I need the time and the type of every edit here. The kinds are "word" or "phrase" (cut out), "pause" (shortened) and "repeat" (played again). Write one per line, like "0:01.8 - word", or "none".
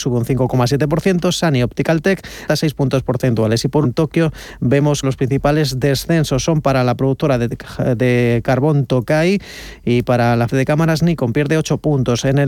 0:02.5 - word
0:03.8 - word
0:05.0 - word
0:10.5 - word

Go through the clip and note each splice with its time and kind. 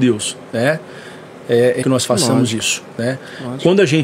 0:01.8 - word

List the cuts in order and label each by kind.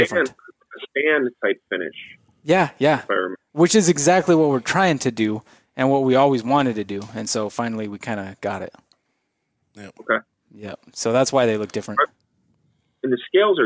none

